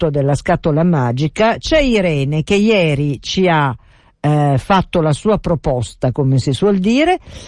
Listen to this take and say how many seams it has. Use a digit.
0